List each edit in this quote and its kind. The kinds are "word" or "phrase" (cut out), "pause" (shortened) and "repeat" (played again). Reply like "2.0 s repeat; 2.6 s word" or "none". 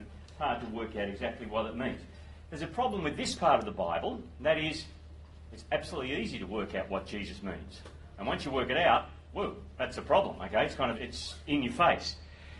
10.9 s word